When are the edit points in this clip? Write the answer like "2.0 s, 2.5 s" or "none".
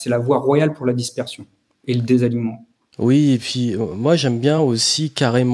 none